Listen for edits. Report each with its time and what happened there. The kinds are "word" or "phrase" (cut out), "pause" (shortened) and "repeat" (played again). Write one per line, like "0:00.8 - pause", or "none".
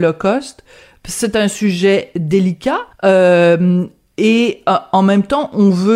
0:02.9 - pause

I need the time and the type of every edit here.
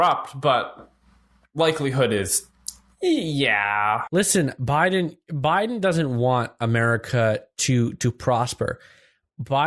none

